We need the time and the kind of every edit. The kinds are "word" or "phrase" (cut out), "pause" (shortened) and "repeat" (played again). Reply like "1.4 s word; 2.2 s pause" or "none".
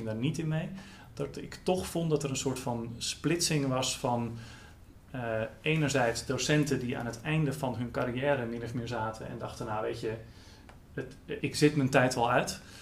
11.4 s word